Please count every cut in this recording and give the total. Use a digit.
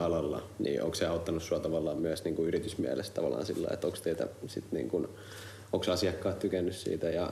0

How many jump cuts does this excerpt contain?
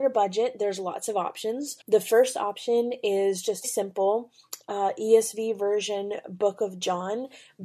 2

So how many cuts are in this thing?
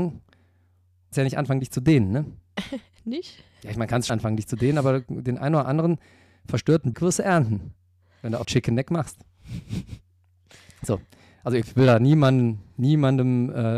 5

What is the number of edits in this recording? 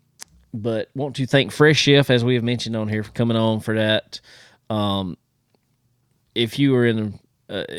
0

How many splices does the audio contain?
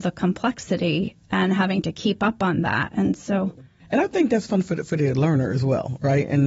0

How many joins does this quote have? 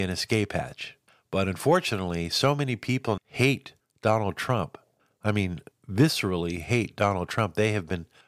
1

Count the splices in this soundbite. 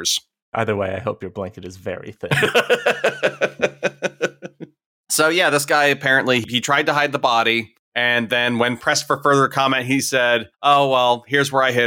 2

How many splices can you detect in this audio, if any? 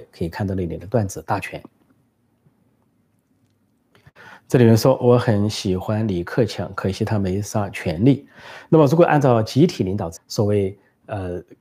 1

